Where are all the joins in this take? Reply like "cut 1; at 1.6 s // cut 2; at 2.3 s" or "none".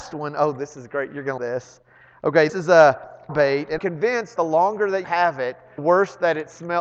cut 1; at 1.4 s // cut 2; at 2.5 s // cut 3; at 3.3 s // cut 4; at 3.8 s // cut 5; at 4.4 s // cut 6; at 5.0 s // cut 7; at 5.8 s